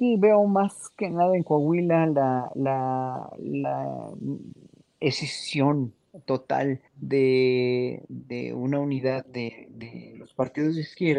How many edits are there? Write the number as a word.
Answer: one